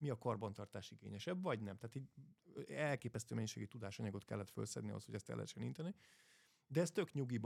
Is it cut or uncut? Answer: uncut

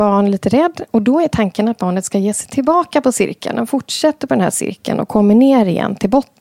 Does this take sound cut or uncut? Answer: uncut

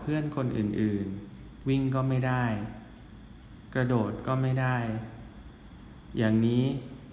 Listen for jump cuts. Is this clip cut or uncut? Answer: cut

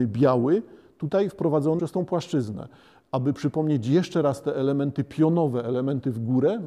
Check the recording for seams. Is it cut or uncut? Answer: cut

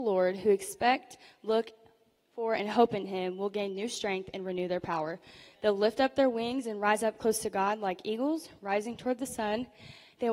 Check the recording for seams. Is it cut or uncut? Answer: uncut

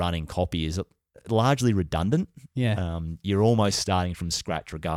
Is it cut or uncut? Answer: uncut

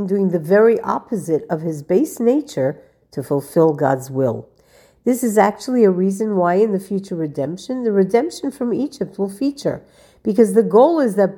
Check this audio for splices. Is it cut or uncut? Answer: uncut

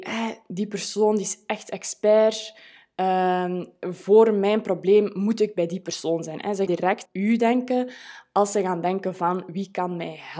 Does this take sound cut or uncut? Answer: cut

